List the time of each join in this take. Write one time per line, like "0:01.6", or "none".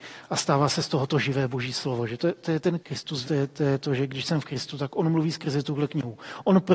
0:02.8
0:03.2

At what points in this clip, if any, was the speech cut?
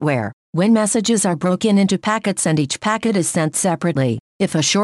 none

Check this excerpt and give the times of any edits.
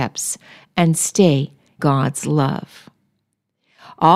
0:01.8

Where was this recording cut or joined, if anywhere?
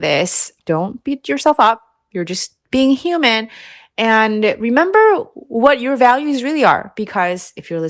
none

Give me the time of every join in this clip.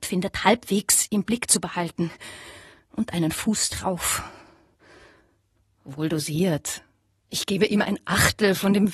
none

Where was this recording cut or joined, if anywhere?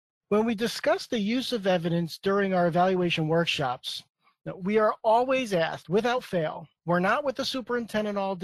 0:06.8

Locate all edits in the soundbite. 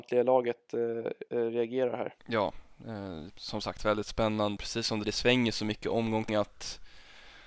0:01.3
0:02.2
0:03.3
0:03.8
0:04.6
0:05.0
0:06.3

